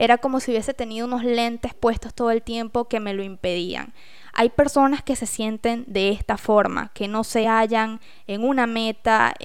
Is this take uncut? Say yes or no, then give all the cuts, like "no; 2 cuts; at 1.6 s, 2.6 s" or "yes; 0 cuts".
yes; 0 cuts